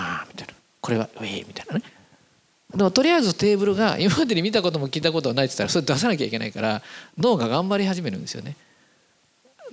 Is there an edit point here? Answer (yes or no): no